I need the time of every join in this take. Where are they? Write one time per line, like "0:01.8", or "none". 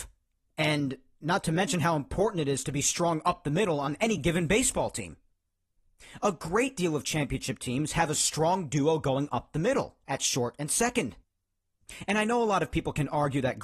none